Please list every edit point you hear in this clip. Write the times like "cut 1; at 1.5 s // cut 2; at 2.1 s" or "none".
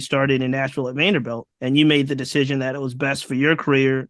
cut 1; at 1.5 s